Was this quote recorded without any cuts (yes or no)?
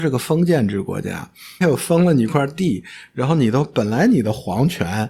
no